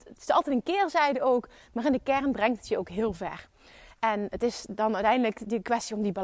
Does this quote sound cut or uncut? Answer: uncut